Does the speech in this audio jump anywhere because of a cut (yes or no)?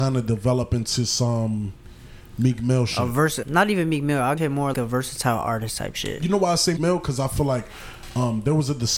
yes